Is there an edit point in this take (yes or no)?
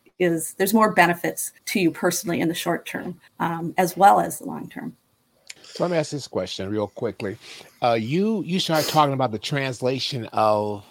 yes